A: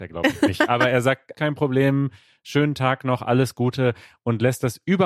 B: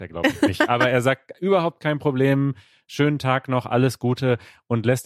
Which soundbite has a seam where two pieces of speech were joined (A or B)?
A